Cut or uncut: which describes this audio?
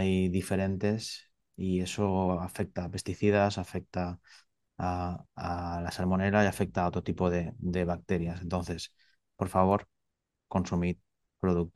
cut